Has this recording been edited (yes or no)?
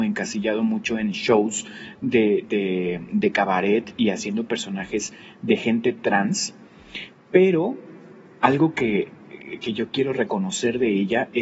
no